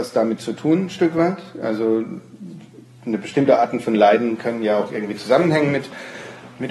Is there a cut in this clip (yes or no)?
no